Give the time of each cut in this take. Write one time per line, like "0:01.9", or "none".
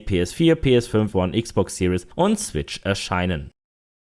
0:01.1